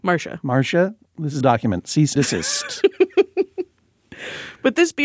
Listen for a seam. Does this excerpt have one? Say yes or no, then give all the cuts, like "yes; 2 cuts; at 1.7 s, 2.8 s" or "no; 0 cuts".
yes; 2 cuts; at 1.4 s, 2.2 s